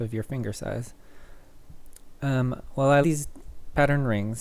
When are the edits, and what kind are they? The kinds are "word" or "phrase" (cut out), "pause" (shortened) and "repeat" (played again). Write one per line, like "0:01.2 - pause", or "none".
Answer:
0:03.0 - word